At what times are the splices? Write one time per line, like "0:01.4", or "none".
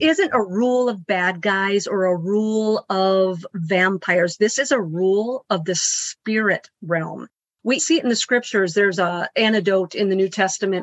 0:07.8